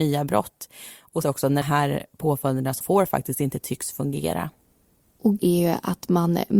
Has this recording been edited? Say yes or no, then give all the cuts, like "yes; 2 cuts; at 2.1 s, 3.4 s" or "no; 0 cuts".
yes; 4 cuts; at 1.2 s, 1.6 s, 2.8 s, 5.4 s